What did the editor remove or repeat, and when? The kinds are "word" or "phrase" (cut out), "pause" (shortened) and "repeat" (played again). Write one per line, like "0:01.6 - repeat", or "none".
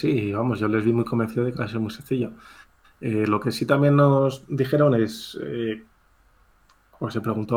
none